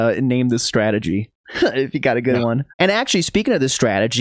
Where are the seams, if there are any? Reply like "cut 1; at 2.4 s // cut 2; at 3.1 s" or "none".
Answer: cut 1; at 2.7 s